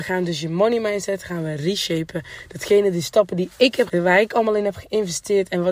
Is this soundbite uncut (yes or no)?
no